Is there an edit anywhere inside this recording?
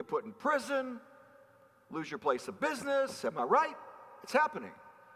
no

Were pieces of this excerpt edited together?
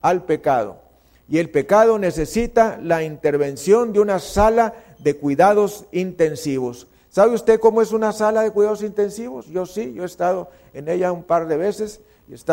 no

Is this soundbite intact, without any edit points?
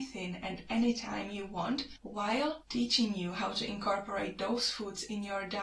yes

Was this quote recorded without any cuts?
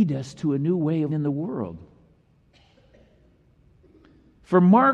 no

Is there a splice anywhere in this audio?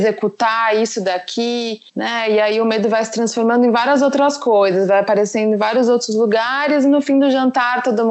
yes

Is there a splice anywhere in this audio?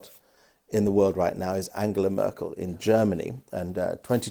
no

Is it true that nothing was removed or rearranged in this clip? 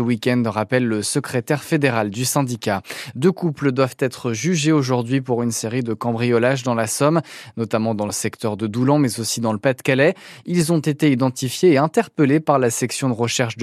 yes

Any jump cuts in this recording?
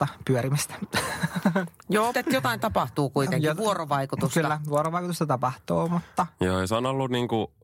yes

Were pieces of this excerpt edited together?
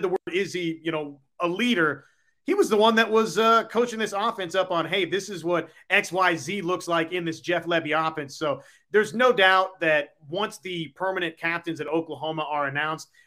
no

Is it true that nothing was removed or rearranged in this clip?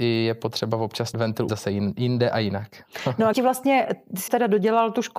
no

